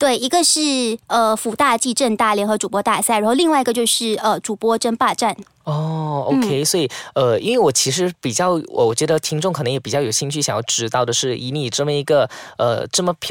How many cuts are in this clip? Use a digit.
1